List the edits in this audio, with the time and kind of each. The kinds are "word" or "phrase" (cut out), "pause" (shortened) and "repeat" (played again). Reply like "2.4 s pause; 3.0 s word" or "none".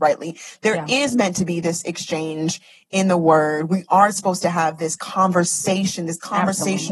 none